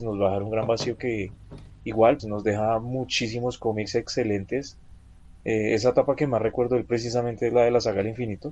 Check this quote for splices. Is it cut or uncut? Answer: cut